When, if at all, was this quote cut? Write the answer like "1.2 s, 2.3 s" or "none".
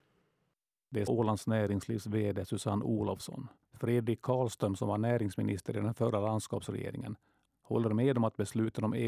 1.1 s, 3.6 s